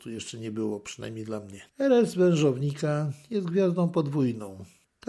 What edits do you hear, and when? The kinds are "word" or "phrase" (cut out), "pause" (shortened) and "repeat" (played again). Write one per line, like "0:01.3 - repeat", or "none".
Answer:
0:01.7 - pause